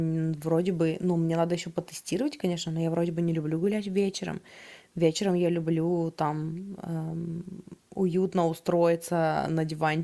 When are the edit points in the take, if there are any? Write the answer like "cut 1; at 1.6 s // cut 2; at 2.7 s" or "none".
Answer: none

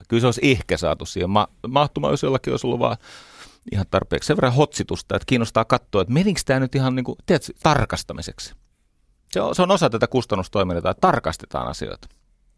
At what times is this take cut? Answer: cut 1; at 7.6 s

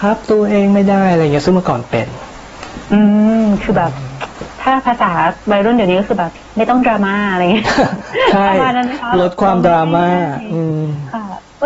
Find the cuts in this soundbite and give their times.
cut 1; at 5.4 s

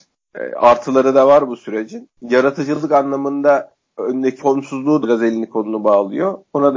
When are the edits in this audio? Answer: cut 1; at 4.4 s // cut 2; at 5.0 s

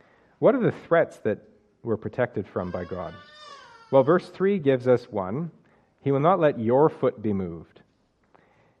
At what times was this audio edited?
none

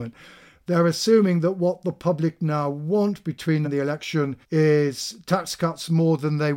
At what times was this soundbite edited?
cut 1; at 3.6 s // cut 2; at 4.4 s

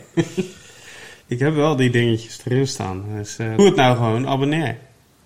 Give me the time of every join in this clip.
cut 1; at 1.2 s // cut 2; at 3.6 s

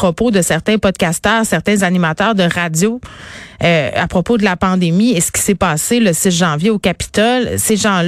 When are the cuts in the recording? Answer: none

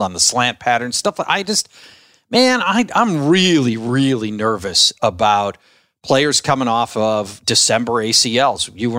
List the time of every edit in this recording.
none

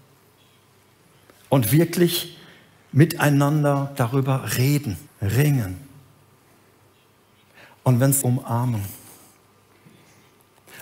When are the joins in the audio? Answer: cut 1; at 5.1 s // cut 2; at 8.2 s

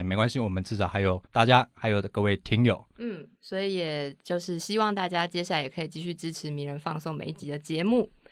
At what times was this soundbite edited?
cut 1; at 1.3 s // cut 2; at 3.3 s

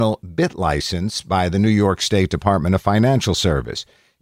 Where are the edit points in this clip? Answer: none

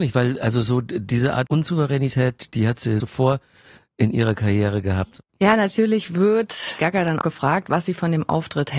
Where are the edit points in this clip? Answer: cut 1; at 1.5 s // cut 2; at 3.0 s // cut 3; at 6.8 s // cut 4; at 7.2 s

